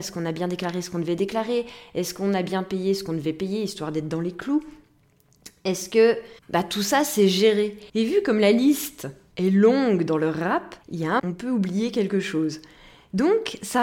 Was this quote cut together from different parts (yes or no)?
yes